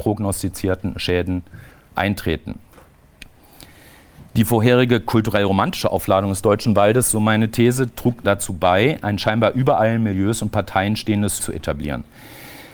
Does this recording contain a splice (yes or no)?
yes